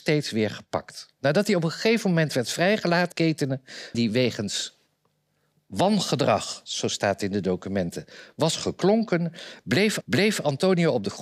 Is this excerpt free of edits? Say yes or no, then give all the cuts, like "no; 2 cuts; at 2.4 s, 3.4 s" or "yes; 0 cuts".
no; 4 cuts; at 1.1 s, 3.1 s, 3.9 s, 10.0 s